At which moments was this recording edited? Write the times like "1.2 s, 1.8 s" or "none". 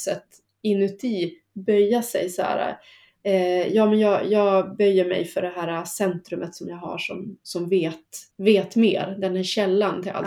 8.3 s